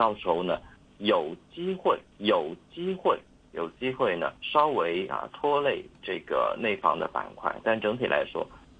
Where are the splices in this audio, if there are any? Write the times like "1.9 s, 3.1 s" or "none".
2.1 s, 4.4 s